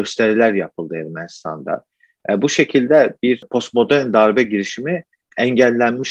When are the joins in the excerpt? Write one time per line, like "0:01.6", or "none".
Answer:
none